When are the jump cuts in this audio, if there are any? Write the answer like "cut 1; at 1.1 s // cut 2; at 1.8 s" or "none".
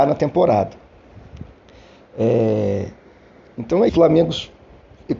cut 1; at 3.9 s